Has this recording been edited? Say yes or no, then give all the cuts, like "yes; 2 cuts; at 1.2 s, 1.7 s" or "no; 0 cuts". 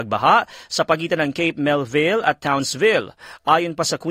no; 0 cuts